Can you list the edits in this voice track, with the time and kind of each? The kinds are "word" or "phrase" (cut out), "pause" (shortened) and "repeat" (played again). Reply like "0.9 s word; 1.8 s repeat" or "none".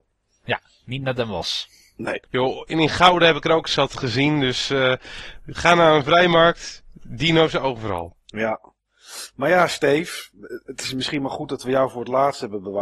2.2 s pause